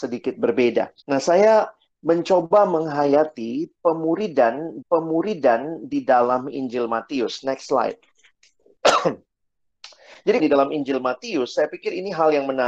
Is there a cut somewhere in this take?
yes; 3 cuts; at 1.0 s, 4.8 s, 10.4 s

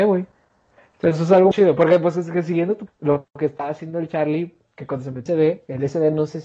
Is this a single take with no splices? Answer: no; 3 cuts; at 1.5 s, 2.9 s, 5.3 s

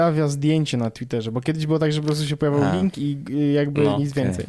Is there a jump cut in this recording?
no; 0 cuts

